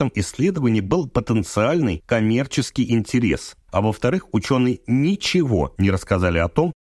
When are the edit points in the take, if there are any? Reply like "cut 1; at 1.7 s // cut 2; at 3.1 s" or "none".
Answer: cut 1; at 3.6 s